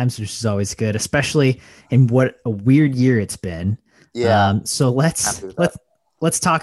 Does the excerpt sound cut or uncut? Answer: uncut